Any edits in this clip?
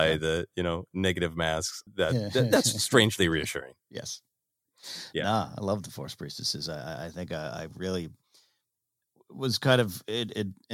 yes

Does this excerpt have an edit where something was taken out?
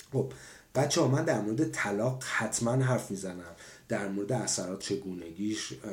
yes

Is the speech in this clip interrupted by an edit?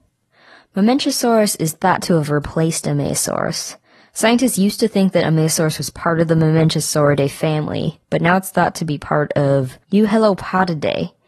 no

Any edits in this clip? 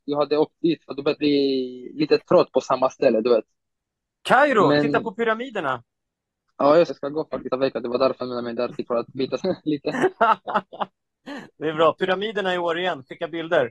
yes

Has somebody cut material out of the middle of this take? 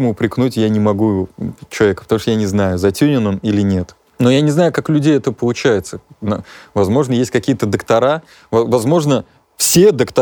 no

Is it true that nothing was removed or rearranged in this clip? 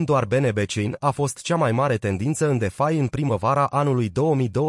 yes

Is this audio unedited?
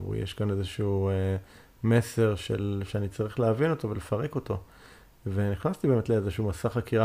yes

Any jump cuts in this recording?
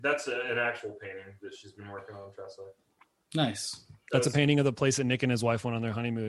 no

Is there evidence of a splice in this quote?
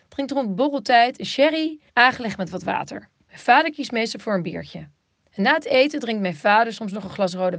yes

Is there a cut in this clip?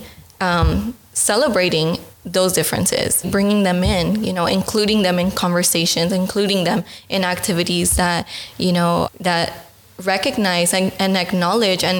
yes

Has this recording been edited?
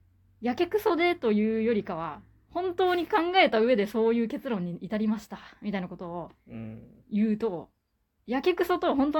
yes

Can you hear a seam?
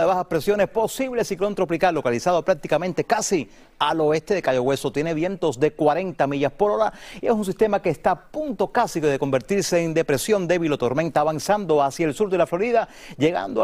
no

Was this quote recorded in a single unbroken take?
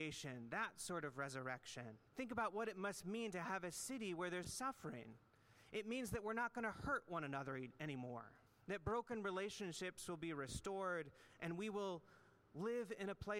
no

